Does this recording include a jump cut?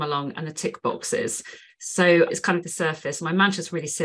yes; 2 cuts; at 2.3 s, 2.6 s

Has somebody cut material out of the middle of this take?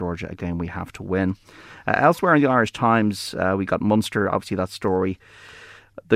no; 0 cuts

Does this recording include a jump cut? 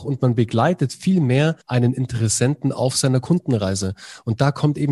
yes; 1 cut; at 1.6 s

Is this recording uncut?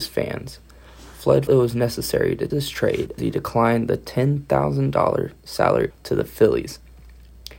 no; 4 cuts; at 1.5 s, 2.5 s, 3.2 s, 5.9 s

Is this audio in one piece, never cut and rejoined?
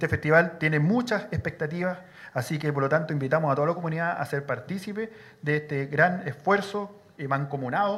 yes; 0 cuts

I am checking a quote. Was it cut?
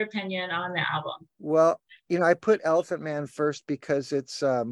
no; 0 cuts

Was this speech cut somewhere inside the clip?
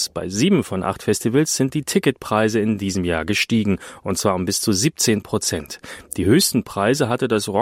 no; 0 cuts

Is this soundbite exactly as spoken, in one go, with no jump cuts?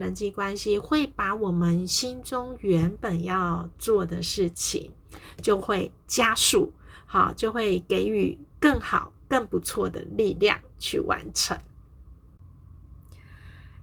no; 2 cuts; at 8.5 s, 9.2 s

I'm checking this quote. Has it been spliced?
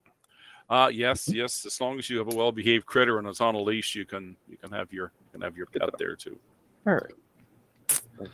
yes; 2 cuts; at 5.2 s, 6.7 s

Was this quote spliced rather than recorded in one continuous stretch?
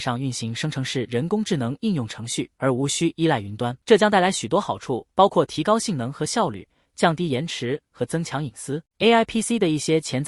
yes; 4 cuts; at 2.5 s, 3.8 s, 5.1 s, 8.9 s

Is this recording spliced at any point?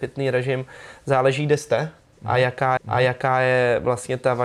yes; 1 cut; at 2.8 s

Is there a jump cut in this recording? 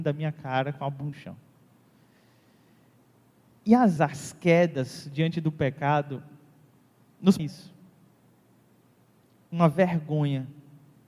yes; 3 cuts; at 1.1 s, 4.0 s, 7.4 s

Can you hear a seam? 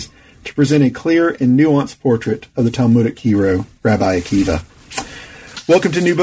no; 0 cuts

